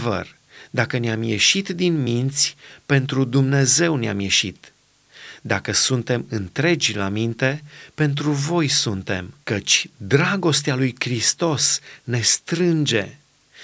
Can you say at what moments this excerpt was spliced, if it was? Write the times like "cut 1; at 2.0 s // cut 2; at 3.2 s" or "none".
cut 1; at 9.4 s

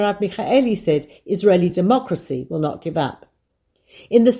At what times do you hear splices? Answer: none

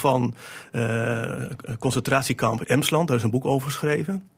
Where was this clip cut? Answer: cut 1; at 2.6 s

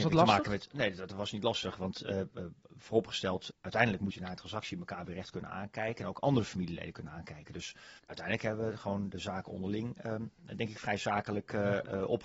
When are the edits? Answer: cut 1; at 3.5 s // cut 2; at 8.0 s

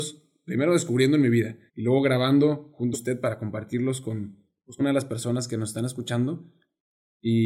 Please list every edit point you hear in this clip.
cut 1; at 1.7 s // cut 2; at 2.9 s // cut 3; at 4.8 s

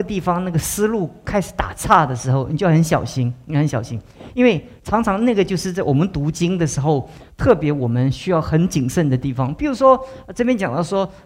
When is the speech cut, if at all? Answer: none

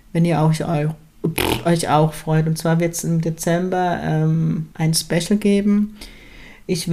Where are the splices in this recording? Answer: cut 1; at 4.7 s

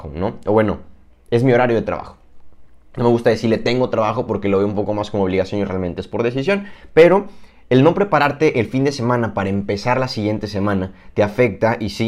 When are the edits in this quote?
none

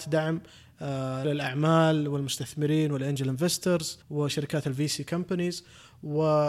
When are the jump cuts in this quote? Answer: cut 1; at 1.2 s // cut 2; at 4.0 s

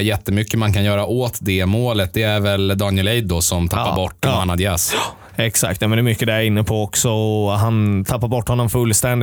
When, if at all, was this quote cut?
none

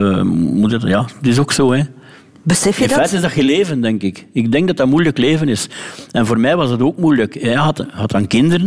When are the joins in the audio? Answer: none

